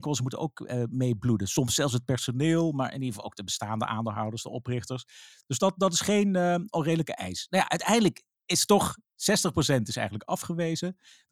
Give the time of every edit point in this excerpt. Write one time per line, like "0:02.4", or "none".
none